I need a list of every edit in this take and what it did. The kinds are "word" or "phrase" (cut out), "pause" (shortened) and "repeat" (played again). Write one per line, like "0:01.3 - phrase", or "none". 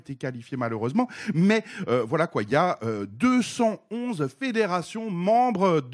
none